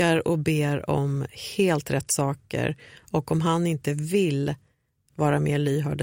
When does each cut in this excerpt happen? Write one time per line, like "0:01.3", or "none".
none